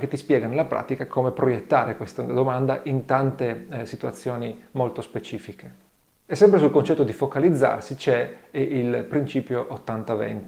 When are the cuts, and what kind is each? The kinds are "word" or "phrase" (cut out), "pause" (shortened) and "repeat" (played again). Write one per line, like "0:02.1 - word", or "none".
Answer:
none